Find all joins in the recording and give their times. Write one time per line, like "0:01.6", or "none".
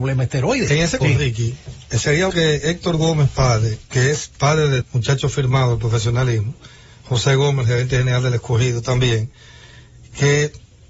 0:01.0
0:02.3
0:03.9
0:04.8